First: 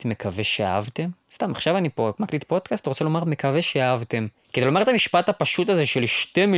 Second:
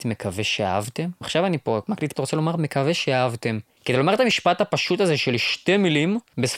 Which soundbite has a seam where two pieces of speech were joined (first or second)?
second